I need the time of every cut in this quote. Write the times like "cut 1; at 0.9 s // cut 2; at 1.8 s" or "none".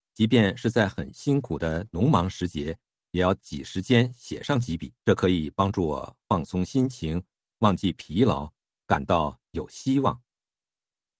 cut 1; at 5.0 s